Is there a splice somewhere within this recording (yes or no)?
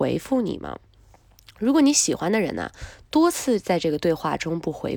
no